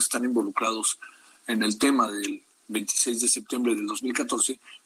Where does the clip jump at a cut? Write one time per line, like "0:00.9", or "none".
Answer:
none